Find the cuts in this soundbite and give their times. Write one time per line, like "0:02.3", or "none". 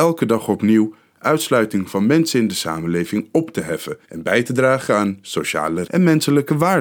0:04.0
0:05.8